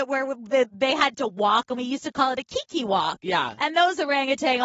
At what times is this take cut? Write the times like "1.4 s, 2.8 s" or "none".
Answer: none